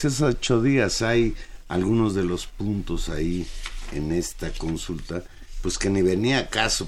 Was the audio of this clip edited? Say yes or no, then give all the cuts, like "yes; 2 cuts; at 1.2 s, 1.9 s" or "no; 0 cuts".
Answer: no; 0 cuts